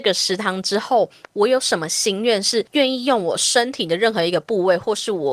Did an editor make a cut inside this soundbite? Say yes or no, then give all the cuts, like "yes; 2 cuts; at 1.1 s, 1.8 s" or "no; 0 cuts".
no; 0 cuts